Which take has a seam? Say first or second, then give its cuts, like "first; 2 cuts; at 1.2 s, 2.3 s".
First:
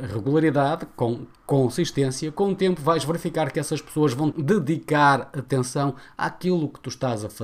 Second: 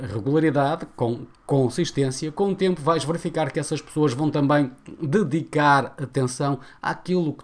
first; 1 cut; at 4.3 s